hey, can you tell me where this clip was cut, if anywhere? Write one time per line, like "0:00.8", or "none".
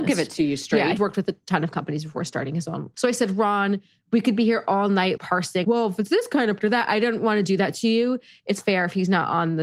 0:01.0
0:02.9
0:05.2
0:05.6
0:06.6
0:08.6